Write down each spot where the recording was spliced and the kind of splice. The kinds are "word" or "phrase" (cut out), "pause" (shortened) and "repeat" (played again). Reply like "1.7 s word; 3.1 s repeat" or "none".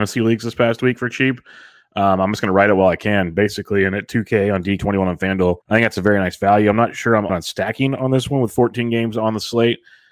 4.8 s word; 5.6 s pause; 7.3 s phrase

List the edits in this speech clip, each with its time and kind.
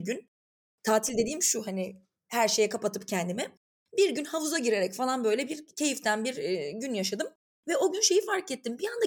none

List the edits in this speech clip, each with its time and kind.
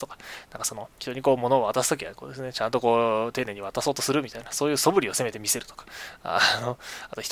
0.9 s pause

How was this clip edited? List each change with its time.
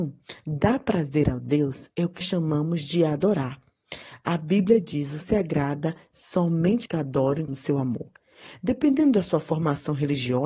2.2 s word; 5.2 s word; 6.9 s word; 7.5 s word

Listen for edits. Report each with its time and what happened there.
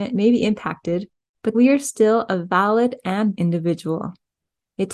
1.5 s word; 3.3 s word

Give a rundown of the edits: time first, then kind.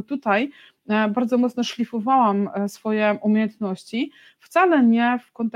none

